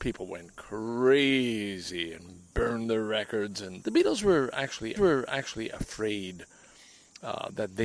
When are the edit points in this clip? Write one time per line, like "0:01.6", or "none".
0:03.8
0:05.0